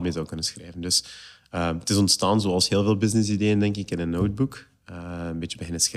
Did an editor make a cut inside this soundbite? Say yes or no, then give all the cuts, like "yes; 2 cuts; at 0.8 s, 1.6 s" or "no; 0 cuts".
no; 0 cuts